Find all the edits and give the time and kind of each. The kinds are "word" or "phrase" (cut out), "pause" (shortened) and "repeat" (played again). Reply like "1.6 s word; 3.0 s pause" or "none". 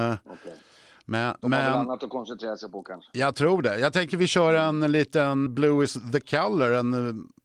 5.5 s word